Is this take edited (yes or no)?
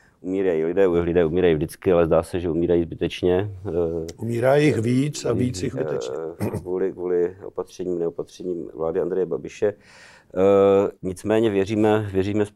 yes